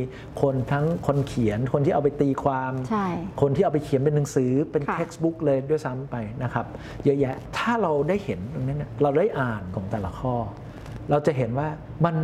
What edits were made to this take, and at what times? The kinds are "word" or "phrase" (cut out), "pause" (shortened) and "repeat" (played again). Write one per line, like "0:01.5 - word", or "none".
0:09.7 - word